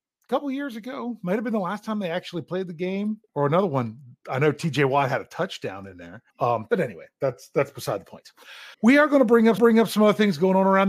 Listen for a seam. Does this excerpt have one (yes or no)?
yes